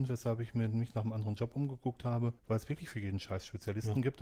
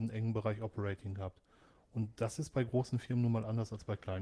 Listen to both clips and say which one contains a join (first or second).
first